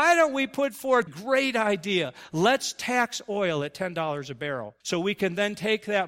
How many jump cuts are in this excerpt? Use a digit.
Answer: 2